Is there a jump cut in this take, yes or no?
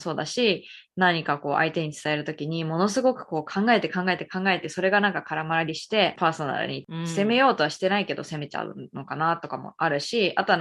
no